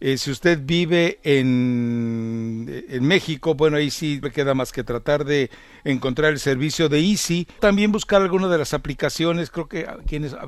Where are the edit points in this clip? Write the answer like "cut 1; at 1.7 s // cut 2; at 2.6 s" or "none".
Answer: cut 1; at 4.2 s // cut 2; at 7.6 s